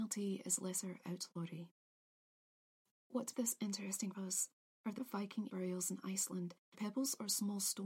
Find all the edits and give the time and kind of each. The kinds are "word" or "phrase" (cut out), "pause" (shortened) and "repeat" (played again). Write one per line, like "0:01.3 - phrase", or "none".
0:03.3 - word
0:04.1 - word
0:05.0 - word
0:05.5 - word
0:06.7 - word